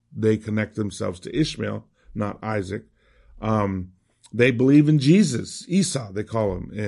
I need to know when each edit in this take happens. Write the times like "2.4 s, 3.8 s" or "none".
none